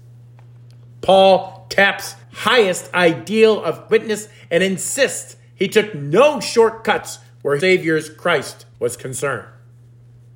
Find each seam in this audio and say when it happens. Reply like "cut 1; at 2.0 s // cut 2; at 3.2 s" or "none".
cut 1; at 2.2 s // cut 2; at 3.9 s // cut 3; at 7.6 s // cut 4; at 8.7 s